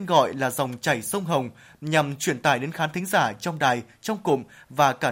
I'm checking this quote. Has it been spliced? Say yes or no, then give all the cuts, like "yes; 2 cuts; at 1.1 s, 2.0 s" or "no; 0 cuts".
no; 0 cuts